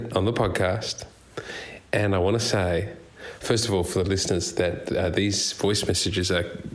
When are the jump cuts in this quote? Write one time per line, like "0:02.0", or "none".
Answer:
none